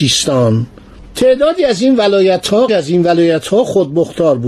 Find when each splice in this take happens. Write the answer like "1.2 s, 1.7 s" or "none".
2.7 s